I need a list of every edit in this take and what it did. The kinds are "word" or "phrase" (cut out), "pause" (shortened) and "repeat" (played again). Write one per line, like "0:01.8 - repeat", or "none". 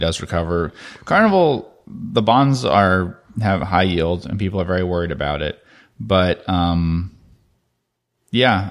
none